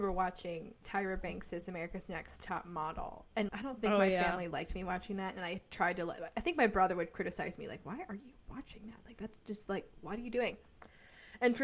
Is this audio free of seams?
no; 2 cuts; at 3.5 s, 9.9 s

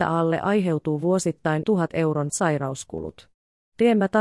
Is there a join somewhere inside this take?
yes; 2 cuts; at 1.6 s, 2.3 s

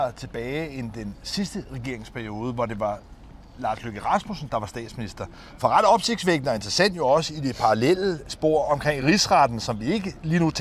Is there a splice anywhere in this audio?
no; 0 cuts

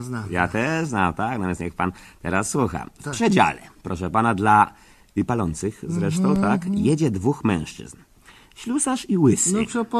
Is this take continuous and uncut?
yes; 0 cuts

